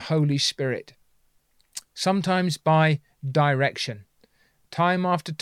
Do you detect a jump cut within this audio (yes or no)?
no